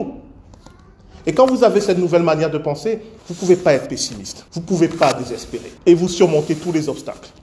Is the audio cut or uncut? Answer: cut